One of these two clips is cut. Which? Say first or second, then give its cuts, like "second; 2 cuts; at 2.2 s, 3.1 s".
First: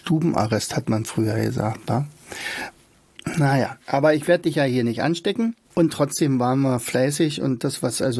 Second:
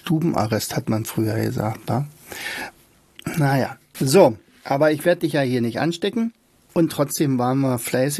first; 2 cuts; at 3.8 s, 5.6 s